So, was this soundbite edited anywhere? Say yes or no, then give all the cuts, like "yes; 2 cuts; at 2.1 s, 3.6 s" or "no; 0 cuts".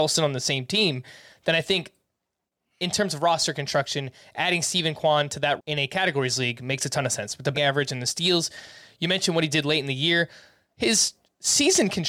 yes; 2 cuts; at 5.6 s, 7.5 s